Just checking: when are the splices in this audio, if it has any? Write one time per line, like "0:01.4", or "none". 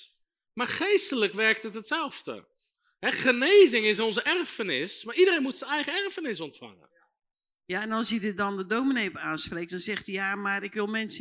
none